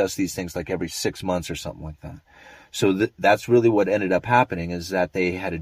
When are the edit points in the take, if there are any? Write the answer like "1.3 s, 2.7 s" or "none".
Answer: none

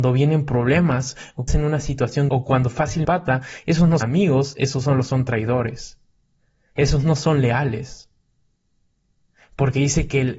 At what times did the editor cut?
1.5 s, 2.3 s, 3.0 s, 4.0 s, 6.2 s

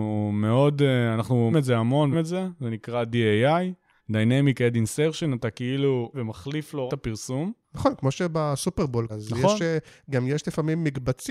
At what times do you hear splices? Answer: 1.5 s, 2.1 s, 4.0 s, 6.1 s, 6.9 s, 7.6 s, 9.1 s

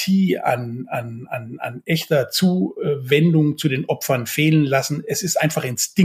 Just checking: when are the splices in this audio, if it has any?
none

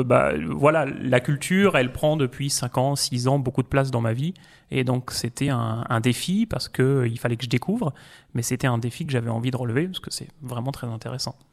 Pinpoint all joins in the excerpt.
none

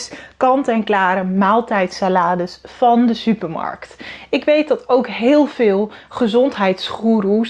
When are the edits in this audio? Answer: none

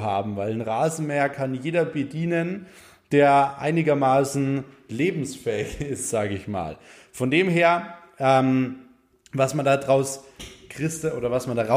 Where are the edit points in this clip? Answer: none

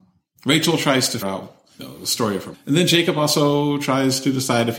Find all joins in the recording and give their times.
1.2 s, 1.8 s, 2.5 s

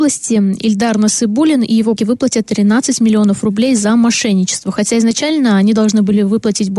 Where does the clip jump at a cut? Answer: 2.0 s

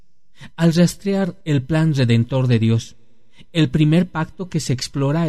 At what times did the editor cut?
1.4 s

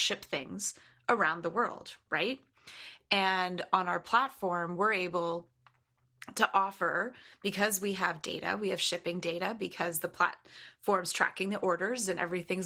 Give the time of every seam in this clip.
none

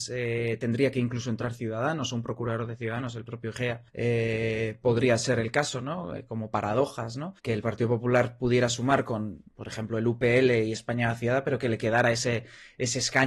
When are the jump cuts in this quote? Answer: 3.9 s, 7.4 s

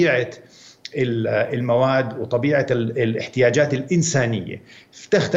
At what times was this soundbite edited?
none

